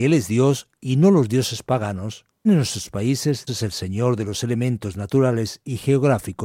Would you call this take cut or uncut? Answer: cut